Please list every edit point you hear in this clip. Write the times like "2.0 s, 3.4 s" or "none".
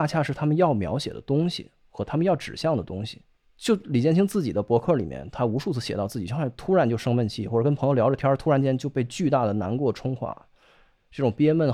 3.4 s

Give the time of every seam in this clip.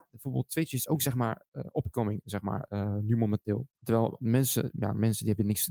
3.7 s

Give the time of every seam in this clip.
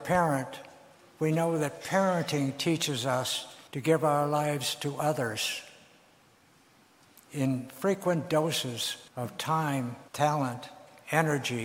3.7 s, 9.1 s, 10.1 s

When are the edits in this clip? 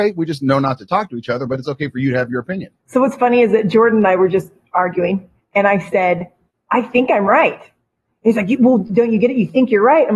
2.8 s

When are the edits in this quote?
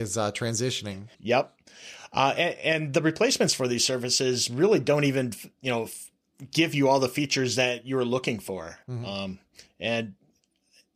1.1 s, 8.8 s

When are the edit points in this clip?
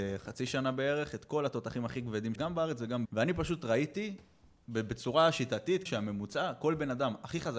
2.4 s, 3.1 s, 5.9 s

